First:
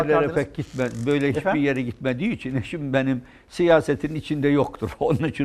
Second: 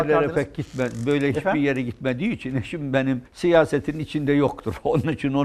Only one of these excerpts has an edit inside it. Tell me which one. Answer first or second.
second